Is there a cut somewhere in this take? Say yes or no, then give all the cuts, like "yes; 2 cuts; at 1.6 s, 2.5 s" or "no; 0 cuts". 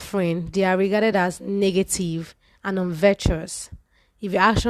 no; 0 cuts